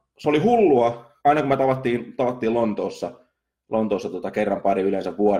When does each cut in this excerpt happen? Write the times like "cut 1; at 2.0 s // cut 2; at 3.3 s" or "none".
cut 1; at 1.2 s